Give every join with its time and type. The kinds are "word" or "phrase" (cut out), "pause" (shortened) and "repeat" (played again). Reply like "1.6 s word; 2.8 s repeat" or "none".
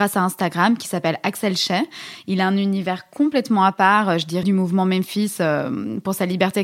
4.4 s word